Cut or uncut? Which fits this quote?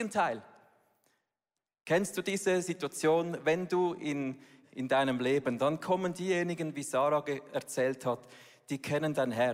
cut